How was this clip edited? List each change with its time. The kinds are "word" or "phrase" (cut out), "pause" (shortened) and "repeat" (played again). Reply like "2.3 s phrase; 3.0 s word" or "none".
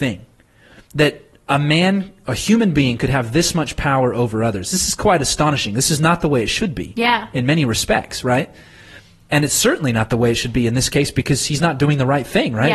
none